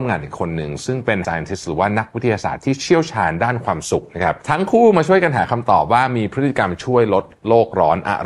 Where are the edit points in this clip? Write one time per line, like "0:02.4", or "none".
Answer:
0:01.2